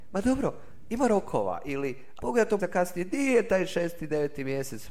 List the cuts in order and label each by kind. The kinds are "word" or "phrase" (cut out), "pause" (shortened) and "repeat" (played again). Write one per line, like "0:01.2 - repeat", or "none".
0:02.2 - word
0:02.6 - word